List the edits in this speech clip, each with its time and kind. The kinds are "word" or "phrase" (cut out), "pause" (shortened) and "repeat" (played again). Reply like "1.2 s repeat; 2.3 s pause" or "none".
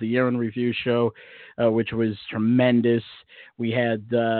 none